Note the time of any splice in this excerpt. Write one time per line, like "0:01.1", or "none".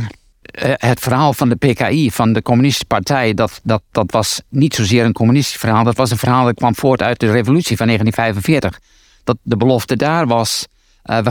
none